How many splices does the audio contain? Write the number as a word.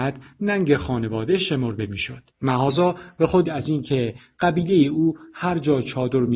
two